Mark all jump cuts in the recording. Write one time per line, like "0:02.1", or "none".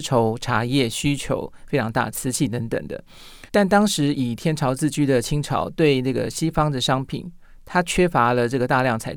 0:03.5